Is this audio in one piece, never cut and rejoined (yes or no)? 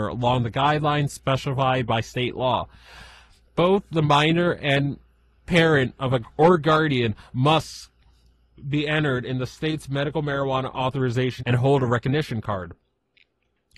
no